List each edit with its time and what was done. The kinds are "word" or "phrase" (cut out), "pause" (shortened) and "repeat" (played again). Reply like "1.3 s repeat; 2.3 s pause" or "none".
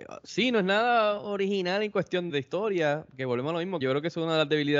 2.3 s word; 3.8 s word